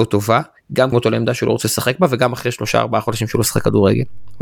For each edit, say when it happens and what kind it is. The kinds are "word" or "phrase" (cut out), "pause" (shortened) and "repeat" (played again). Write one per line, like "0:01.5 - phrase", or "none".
0:00.9 - word